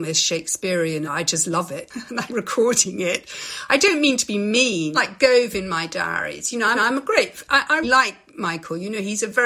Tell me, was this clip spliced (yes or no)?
yes